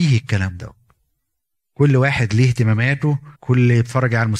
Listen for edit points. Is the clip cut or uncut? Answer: cut